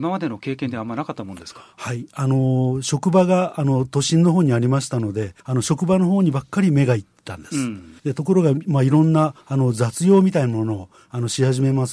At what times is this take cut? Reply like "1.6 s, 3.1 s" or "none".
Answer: 5.4 s, 8.0 s